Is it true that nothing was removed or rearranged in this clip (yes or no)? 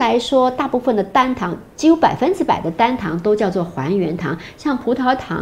no